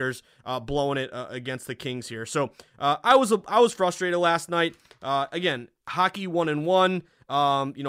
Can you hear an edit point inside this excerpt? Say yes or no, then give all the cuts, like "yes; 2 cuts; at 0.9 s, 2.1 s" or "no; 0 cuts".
no; 0 cuts